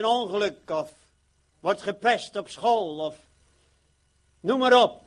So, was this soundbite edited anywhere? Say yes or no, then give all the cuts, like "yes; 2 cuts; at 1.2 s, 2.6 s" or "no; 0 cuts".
no; 0 cuts